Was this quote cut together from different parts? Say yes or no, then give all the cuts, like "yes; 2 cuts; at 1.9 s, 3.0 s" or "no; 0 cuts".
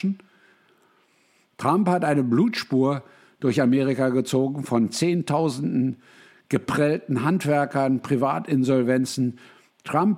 no; 0 cuts